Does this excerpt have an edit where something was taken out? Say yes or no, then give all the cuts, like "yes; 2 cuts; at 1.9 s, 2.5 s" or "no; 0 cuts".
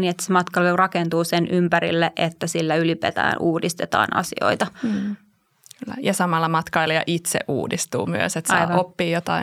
no; 0 cuts